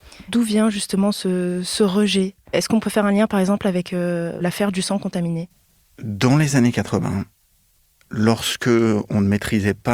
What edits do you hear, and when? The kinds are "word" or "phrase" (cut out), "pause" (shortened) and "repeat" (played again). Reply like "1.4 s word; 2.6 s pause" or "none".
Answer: none